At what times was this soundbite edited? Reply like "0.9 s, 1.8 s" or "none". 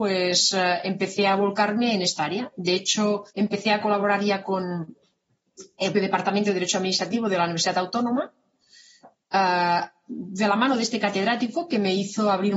3.3 s, 5.9 s